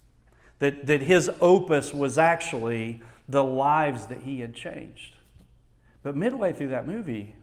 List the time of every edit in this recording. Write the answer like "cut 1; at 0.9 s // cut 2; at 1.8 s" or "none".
none